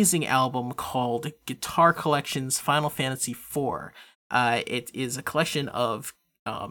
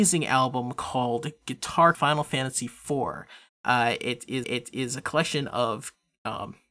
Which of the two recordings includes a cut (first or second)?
second